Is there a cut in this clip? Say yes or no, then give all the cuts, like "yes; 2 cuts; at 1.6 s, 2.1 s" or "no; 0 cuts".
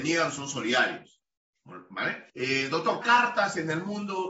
yes; 2 cuts; at 2.3 s, 3.0 s